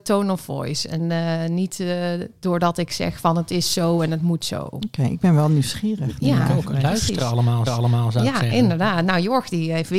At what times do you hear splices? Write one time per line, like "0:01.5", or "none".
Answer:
0:07.7